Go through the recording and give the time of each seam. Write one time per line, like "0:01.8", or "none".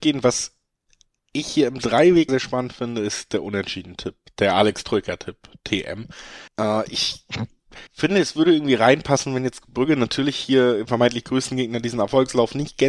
0:02.3
0:06.5
0:07.9
0:10.9